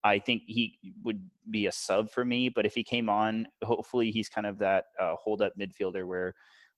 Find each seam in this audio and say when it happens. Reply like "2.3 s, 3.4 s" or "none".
none